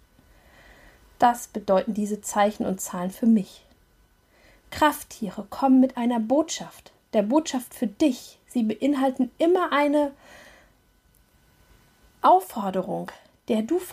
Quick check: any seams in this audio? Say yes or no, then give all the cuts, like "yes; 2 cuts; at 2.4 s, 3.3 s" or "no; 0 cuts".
no; 0 cuts